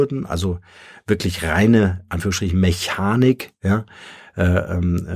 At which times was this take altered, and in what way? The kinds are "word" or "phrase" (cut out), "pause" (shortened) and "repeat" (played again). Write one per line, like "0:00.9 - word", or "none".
none